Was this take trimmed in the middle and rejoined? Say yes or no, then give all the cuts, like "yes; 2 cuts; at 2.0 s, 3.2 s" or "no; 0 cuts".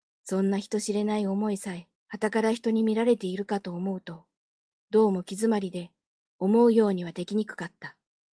yes; 1 cut; at 2.0 s